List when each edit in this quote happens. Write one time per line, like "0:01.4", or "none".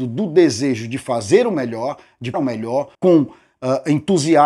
0:02.3
0:02.9